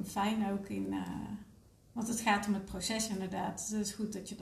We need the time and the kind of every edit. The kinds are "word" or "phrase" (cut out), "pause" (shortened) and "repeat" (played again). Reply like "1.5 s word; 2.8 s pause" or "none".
1.7 s pause